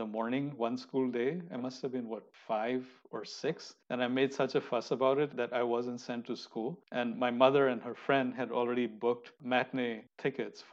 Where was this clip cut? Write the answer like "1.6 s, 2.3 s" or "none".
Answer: 3.8 s, 6.8 s